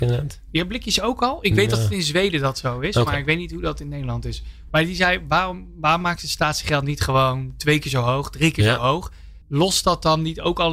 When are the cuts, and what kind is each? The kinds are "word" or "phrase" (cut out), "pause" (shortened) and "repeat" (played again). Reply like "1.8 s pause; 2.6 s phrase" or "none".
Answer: 9.4 s pause